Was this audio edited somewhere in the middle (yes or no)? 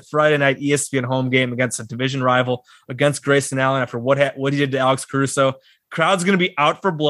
no